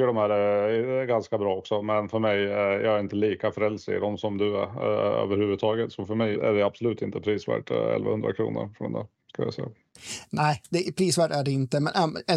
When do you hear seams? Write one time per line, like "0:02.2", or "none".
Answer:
0:06.3